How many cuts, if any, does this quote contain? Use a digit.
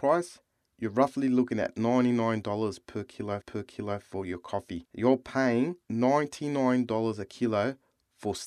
3